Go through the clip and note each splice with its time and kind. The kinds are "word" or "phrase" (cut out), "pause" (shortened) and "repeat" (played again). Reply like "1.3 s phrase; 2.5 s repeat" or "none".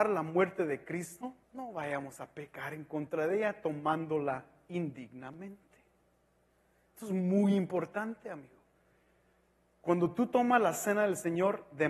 1.4 s pause; 4.7 s phrase